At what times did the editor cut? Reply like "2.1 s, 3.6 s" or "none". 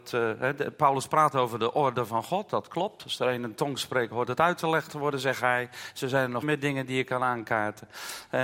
6.4 s